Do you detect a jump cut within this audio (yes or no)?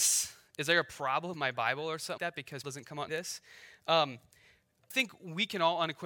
yes